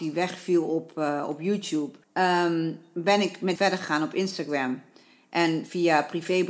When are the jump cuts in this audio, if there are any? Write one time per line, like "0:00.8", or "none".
0:02.0
0:03.6